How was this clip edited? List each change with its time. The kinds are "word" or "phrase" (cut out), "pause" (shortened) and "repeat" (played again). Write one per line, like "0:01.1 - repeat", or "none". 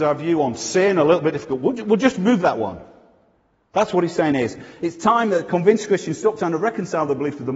none

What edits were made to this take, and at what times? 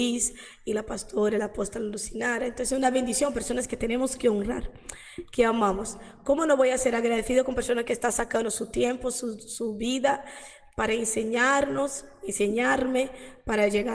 none

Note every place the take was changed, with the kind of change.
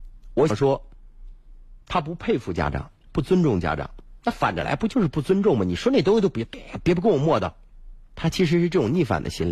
0:01.8 - pause

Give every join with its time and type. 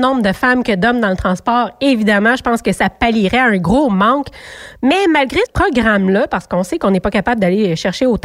0:05.5 - word

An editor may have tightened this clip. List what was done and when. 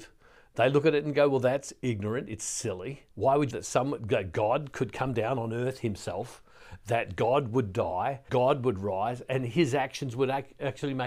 0:03.1 - pause
0:03.5 - phrase
0:08.3 - word

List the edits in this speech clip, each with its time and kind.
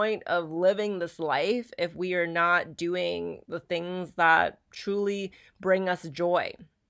none

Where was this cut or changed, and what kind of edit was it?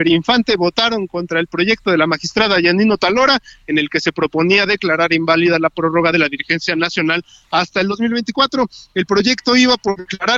none

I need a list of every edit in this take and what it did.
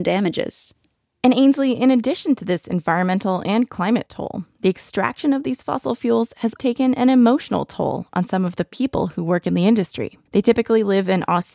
0:06.6 - word
0:10.3 - pause

